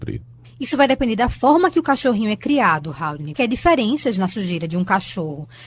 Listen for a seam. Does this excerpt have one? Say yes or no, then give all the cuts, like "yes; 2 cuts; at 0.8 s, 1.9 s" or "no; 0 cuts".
yes; 1 cut; at 3.3 s